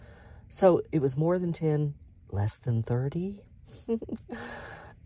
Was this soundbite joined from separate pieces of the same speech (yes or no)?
no